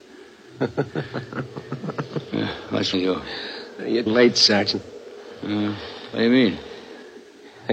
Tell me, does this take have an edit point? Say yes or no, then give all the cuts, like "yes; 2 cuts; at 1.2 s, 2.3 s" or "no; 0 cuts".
yes; 2 cuts; at 2.9 s, 4.1 s